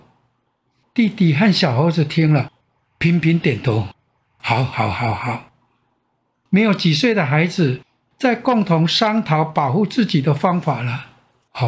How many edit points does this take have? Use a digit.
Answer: 0